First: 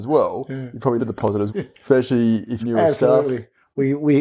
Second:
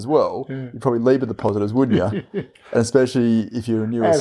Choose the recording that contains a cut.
first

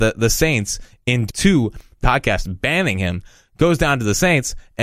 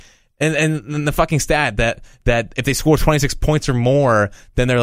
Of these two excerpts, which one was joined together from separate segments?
first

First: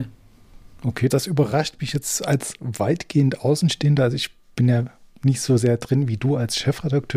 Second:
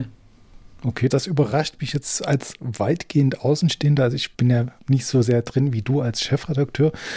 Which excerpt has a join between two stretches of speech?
second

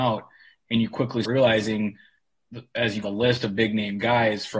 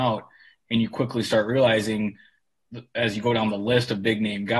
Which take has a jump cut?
first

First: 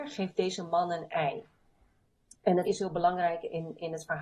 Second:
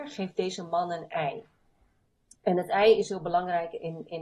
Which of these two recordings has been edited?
first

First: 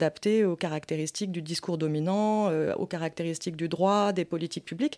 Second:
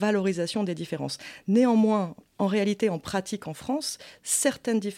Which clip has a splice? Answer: second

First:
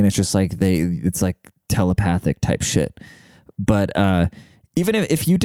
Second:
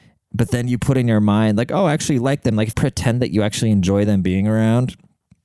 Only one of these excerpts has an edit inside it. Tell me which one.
second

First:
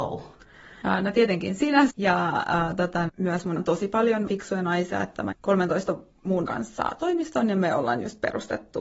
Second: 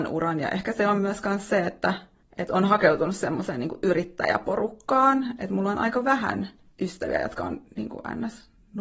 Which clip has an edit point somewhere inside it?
first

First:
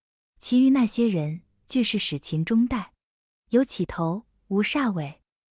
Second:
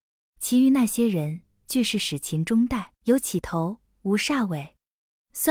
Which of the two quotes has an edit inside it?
second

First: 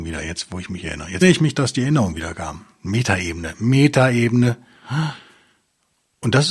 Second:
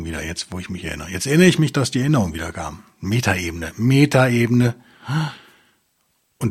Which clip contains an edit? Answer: first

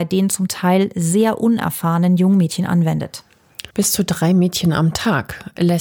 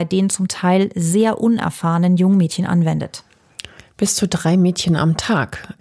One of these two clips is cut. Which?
first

